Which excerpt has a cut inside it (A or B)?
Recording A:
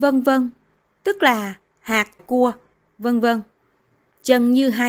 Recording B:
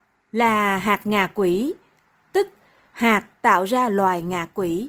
A